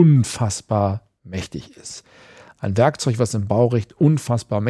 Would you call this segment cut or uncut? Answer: uncut